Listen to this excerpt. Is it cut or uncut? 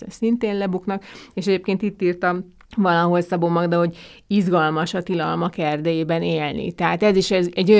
cut